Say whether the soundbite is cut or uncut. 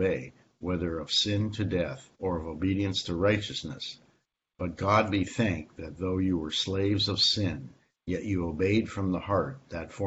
cut